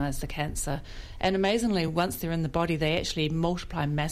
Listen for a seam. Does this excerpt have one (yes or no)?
no